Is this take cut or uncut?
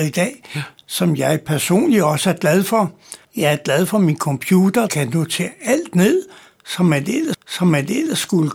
cut